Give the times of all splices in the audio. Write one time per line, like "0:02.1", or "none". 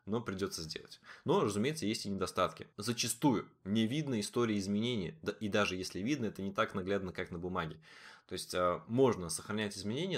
0:02.7